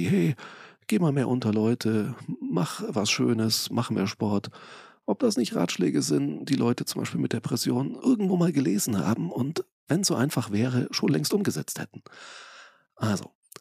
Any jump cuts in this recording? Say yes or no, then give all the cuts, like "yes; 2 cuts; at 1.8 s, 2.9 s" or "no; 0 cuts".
yes; 1 cut; at 8.0 s